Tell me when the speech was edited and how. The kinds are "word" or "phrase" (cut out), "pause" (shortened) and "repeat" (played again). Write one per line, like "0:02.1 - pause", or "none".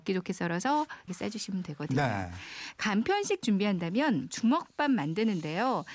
0:01.1 - word
0:03.4 - word
0:04.3 - word